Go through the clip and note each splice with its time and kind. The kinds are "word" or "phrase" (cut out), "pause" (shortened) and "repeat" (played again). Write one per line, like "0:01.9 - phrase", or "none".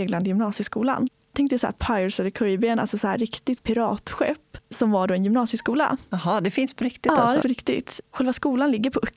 0:07.4 - word